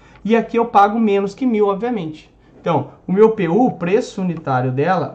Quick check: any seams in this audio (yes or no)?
no